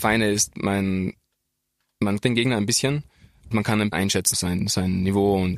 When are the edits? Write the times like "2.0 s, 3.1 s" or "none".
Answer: 2.2 s, 3.5 s, 3.9 s, 4.3 s